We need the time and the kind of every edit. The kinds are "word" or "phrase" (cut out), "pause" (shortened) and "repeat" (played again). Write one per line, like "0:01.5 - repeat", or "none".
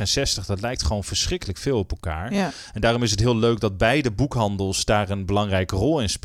none